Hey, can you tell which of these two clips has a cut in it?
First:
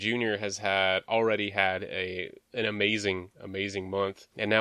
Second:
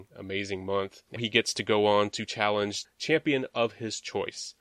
second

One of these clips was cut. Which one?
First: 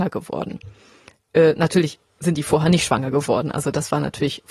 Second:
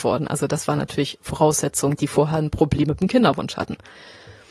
second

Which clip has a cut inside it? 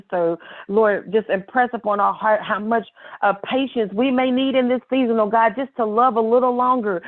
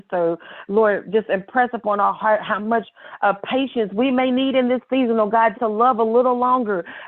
second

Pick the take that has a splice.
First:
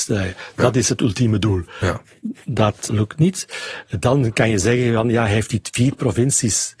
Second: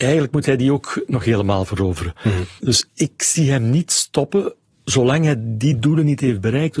first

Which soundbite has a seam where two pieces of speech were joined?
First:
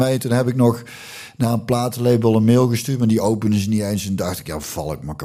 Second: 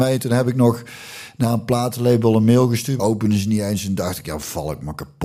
second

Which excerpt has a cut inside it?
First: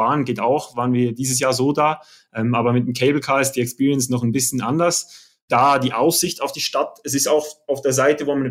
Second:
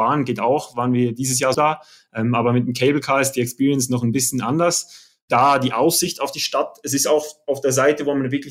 second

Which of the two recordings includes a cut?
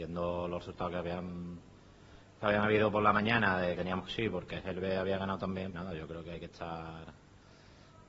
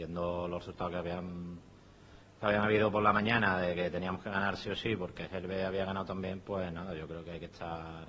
first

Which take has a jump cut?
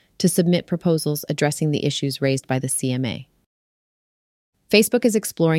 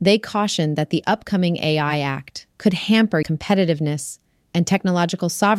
second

